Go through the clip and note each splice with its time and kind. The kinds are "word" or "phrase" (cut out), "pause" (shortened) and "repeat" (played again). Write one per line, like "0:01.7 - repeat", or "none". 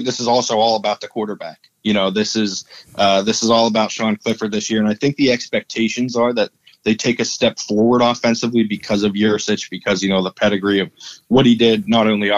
none